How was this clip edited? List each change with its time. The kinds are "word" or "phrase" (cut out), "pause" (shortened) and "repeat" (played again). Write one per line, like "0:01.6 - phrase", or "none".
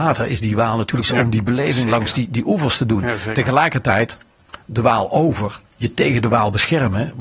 0:01.0 - word
0:05.7 - pause